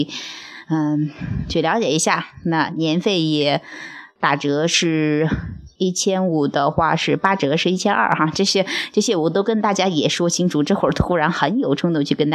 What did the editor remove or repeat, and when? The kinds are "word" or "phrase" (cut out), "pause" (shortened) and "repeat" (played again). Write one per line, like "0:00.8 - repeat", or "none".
0:05.8 - pause

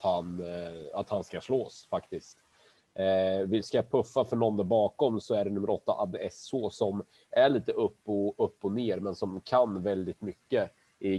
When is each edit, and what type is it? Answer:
0:05.2 - word

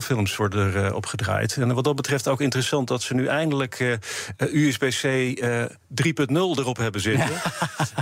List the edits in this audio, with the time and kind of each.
none

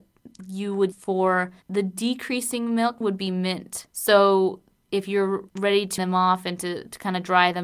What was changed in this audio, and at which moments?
0:00.9 - word
0:01.6 - pause
0:03.0 - word
0:03.9 - pause
0:05.5 - pause
0:06.0 - word

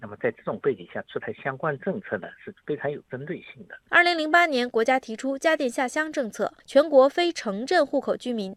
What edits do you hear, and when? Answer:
0:06.6 - pause

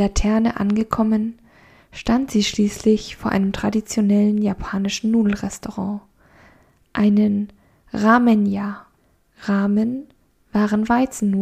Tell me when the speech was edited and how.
0:09.0 - pause

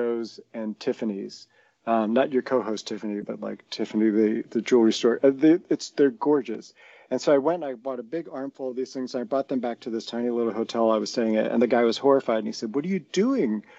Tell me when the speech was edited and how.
none

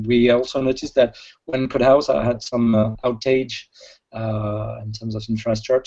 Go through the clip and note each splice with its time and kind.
none

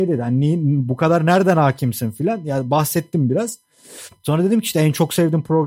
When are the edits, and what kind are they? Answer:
none

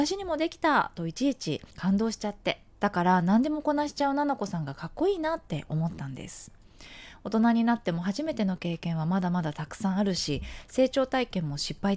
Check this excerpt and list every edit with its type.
0:01.7 - pause
0:02.7 - pause

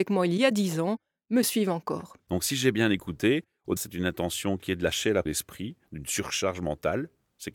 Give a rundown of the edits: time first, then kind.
0:03.8 - word
0:05.3 - phrase

